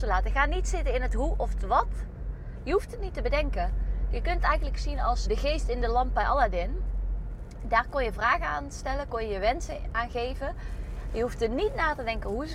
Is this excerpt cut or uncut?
cut